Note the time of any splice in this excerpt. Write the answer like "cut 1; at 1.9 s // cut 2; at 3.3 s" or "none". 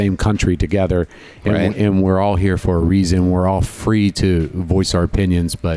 none